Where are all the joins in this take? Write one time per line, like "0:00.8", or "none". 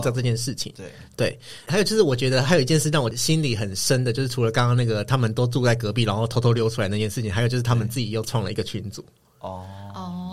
none